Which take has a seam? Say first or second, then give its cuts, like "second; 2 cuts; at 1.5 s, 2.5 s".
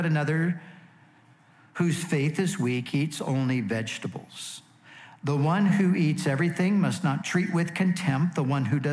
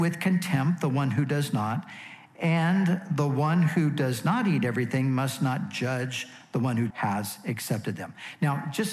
second; 1 cut; at 6.9 s